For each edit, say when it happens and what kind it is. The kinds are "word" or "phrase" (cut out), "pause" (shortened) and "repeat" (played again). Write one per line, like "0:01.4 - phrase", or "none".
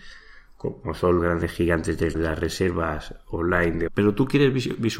0:01.2 - word
0:02.1 - word
0:03.9 - word